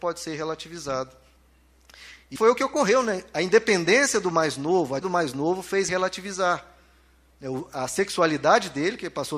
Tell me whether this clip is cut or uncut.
cut